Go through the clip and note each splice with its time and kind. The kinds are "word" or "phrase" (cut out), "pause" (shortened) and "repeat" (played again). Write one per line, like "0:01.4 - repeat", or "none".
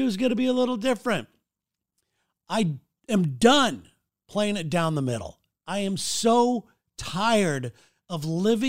none